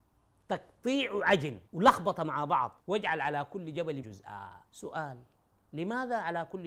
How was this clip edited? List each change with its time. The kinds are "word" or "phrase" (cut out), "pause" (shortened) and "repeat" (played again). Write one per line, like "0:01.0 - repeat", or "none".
0:01.7 - pause
0:02.8 - pause
0:04.0 - word
0:04.7 - pause